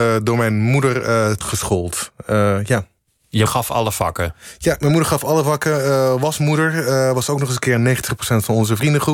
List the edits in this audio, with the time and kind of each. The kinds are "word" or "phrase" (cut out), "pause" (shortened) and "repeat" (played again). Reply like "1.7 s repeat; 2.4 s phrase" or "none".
1.4 s word; 3.5 s word